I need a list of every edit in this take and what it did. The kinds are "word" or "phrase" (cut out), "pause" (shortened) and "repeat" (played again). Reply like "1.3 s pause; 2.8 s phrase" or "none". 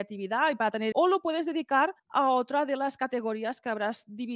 0.9 s phrase; 2.0 s pause